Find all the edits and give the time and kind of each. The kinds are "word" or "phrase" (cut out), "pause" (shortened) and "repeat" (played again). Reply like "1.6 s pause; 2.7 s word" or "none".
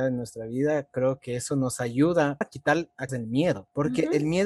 0.9 s word; 2.4 s word; 3.1 s word